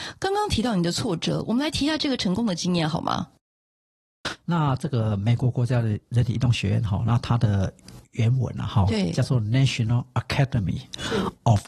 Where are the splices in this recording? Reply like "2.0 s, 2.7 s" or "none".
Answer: none